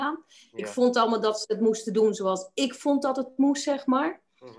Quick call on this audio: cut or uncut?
uncut